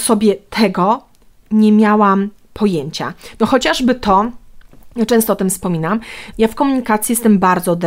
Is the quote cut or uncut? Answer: cut